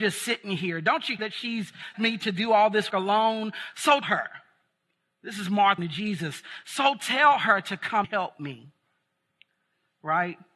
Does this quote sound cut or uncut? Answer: cut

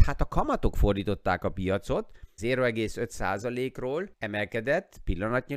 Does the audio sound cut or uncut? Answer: cut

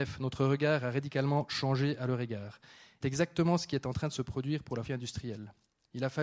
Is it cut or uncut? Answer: cut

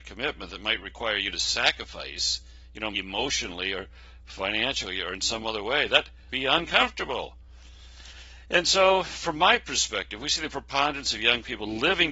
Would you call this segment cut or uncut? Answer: cut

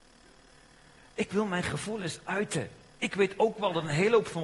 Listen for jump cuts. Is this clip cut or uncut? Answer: uncut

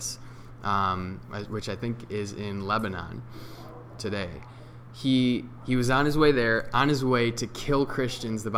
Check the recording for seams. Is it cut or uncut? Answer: uncut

